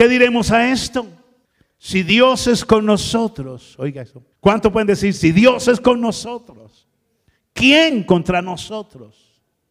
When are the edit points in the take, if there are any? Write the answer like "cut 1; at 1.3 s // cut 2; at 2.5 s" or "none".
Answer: cut 1; at 1.4 s // cut 2; at 4.3 s